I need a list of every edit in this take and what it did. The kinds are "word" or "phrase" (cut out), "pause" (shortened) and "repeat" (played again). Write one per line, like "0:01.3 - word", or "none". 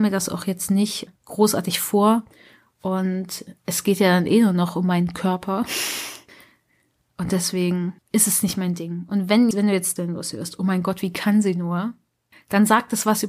0:01.2 - pause
0:08.0 - pause
0:09.5 - word
0:10.0 - word

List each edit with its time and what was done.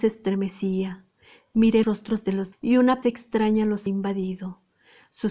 0:01.8 - word
0:02.5 - word
0:03.0 - word
0:03.9 - word

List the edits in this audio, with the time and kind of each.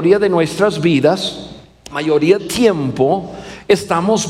0:01.9 - word
0:02.4 - word

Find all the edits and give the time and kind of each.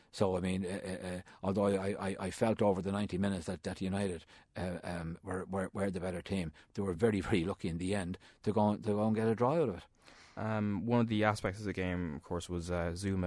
none

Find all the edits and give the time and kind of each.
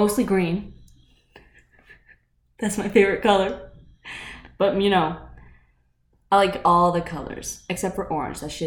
none

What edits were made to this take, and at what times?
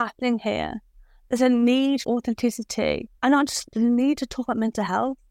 0:02.0 - word
0:03.2 - pause
0:03.7 - word

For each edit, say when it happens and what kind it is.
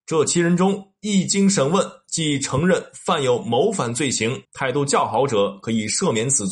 0:04.4 - pause

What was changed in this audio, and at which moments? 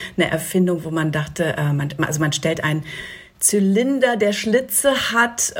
none

